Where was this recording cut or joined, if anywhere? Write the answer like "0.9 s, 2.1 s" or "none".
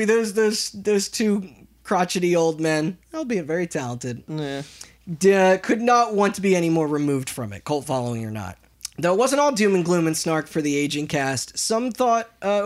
none